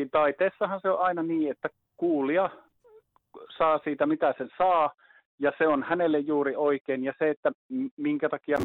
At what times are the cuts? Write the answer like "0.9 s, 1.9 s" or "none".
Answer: none